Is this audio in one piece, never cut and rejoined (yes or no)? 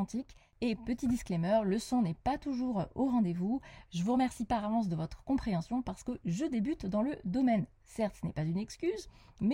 yes